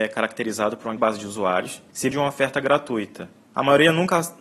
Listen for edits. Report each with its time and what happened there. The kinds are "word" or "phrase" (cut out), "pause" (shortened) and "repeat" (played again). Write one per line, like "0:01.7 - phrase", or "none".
0:01.0 - word
0:02.1 - word